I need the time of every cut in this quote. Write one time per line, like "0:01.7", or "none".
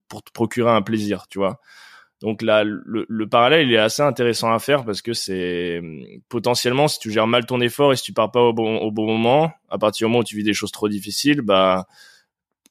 none